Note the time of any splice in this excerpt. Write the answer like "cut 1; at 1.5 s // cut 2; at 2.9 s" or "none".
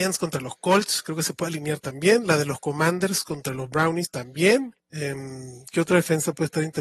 cut 1; at 4.8 s